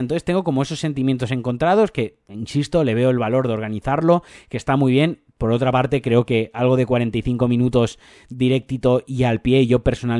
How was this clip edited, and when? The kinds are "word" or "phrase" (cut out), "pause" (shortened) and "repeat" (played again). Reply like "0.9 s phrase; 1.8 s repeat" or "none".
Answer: none